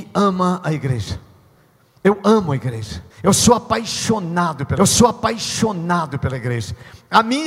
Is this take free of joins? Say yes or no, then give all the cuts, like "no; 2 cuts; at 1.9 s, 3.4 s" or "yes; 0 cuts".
no; 2 cuts; at 3.1 s, 4.8 s